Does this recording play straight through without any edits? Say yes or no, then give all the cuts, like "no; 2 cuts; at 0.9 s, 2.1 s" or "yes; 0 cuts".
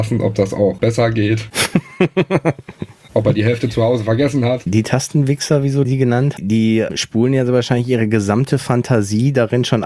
no; 1 cut; at 6.4 s